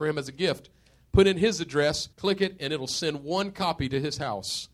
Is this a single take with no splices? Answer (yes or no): no